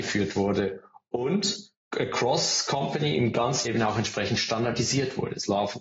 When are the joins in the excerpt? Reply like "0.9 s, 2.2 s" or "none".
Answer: 1.8 s, 3.6 s